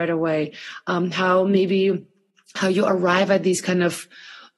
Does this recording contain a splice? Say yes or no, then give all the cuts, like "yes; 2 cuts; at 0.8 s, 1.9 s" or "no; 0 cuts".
no; 0 cuts